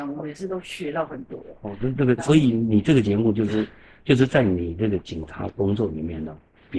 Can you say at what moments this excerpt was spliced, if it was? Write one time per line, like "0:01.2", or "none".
0:02.2

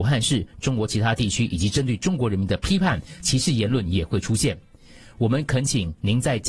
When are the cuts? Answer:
none

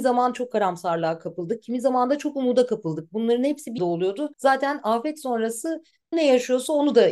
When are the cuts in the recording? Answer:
0:03.8
0:04.3
0:06.1

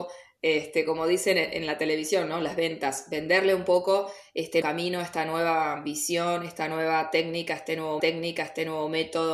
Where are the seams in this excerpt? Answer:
0:04.6
0:08.0

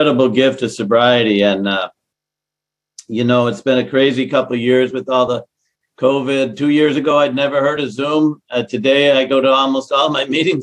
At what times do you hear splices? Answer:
none

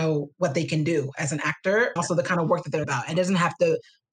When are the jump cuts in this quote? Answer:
0:02.0
0:02.8

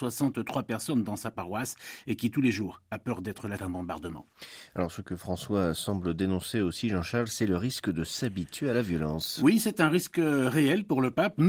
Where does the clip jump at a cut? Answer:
0:03.6

